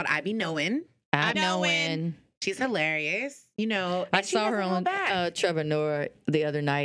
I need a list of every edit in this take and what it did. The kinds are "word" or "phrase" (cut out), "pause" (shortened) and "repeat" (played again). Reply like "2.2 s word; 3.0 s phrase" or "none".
1.3 s word